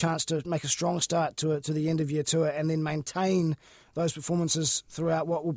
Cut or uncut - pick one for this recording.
uncut